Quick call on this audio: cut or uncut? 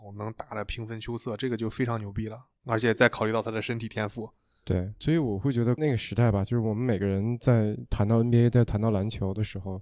uncut